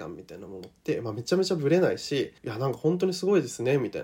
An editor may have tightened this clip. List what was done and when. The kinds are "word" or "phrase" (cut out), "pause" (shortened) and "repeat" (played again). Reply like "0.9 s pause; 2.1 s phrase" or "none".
2.4 s pause